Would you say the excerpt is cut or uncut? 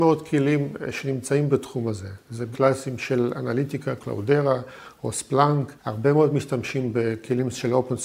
cut